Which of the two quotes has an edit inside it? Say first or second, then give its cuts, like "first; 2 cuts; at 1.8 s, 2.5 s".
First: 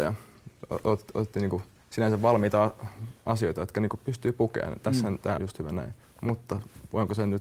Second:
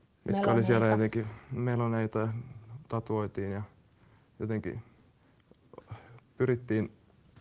first; 1 cut; at 5.4 s